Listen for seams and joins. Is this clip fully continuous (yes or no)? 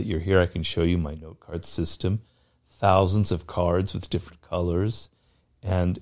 yes